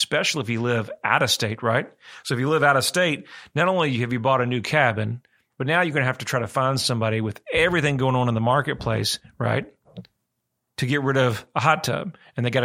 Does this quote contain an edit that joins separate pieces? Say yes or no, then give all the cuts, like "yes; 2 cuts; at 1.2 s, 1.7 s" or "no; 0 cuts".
no; 0 cuts